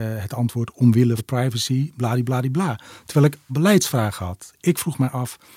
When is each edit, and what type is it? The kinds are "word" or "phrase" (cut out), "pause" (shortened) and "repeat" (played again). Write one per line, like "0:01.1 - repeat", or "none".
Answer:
0:01.2 - word
0:03.5 - word

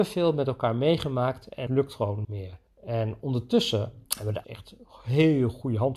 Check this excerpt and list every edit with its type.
0:01.7 - word
0:02.2 - word
0:02.7 - pause
0:04.1 - pause
0:04.4 - word

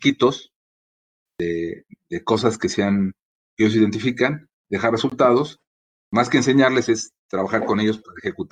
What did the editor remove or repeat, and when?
none

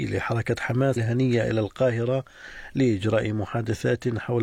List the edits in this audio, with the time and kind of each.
0:01.0 - word

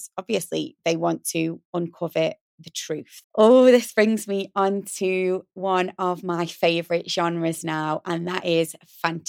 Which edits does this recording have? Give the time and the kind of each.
0:03.2 - pause

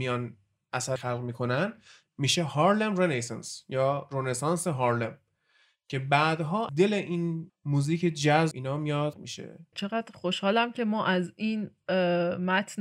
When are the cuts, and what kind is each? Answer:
0:01.0 - word
0:06.7 - word
0:07.5 - word
0:08.5 - word
0:09.1 - word
0:09.7 - word

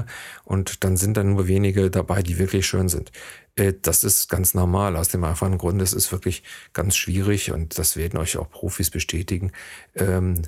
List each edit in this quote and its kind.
none

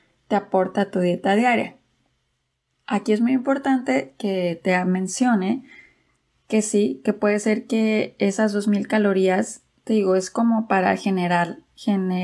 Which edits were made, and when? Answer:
none

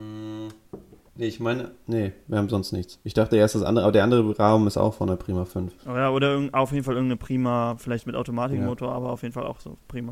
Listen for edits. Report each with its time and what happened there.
0:01.1 - pause
0:05.8 - pause

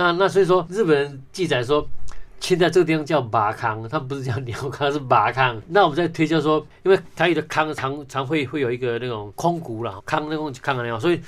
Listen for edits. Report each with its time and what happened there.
0:10.0 - word

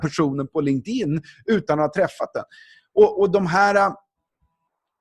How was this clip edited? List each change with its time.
none

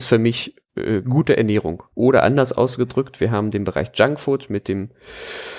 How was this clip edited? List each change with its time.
0:01.9 - pause

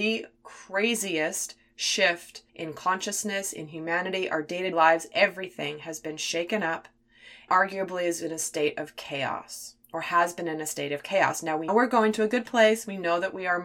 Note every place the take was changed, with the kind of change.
0:02.5 - pause
0:04.7 - word
0:07.5 - word
0:09.8 - pause
0:11.7 - word

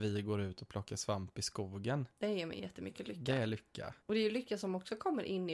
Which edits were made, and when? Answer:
0:04.0 - pause

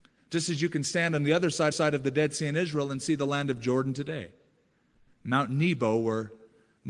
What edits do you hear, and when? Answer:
0:01.7 - repeat

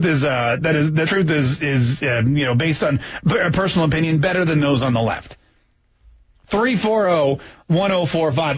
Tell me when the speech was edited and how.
0:01.1 - word

